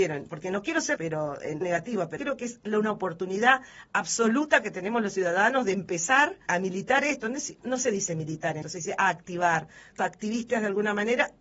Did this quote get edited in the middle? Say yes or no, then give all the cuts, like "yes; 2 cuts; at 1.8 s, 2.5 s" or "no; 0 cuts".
yes; 7 cuts; at 1.0 s, 1.6 s, 2.2 s, 6.5 s, 7.6 s, 8.6 s, 10.0 s